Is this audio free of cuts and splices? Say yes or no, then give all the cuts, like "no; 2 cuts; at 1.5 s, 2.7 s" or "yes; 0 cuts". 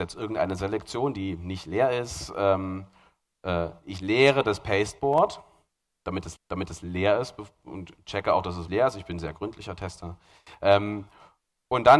no; 2 cuts; at 6.4 s, 8.7 s